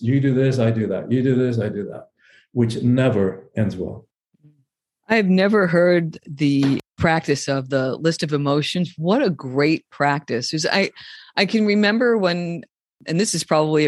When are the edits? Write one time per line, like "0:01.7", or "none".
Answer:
none